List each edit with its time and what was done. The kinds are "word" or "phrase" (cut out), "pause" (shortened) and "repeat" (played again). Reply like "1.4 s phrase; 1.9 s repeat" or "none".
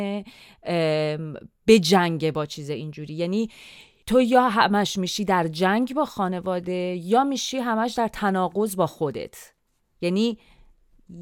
none